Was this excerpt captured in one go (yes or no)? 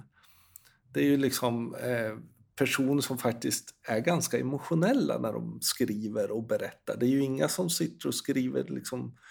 yes